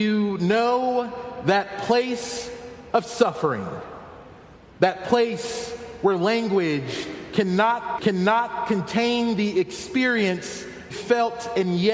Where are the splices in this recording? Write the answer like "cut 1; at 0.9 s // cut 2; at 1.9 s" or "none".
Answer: cut 1; at 4.6 s // cut 2; at 8.0 s // cut 3; at 10.9 s

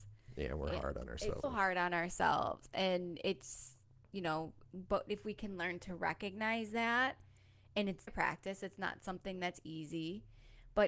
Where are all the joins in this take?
cut 1; at 1.4 s // cut 2; at 8.1 s

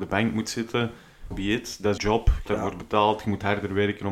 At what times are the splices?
cut 1; at 1.3 s // cut 2; at 2.0 s // cut 3; at 2.5 s

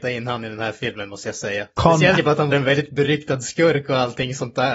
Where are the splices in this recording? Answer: cut 1; at 1.7 s // cut 2; at 2.2 s // cut 3; at 2.5 s

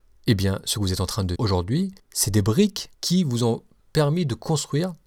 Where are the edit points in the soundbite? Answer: cut 1; at 1.4 s // cut 2; at 2.0 s // cut 3; at 2.9 s

